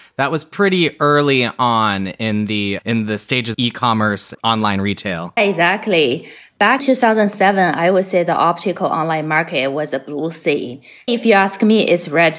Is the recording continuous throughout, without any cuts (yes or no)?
no